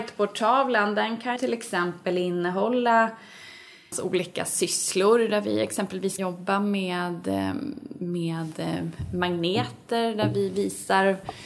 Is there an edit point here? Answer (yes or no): yes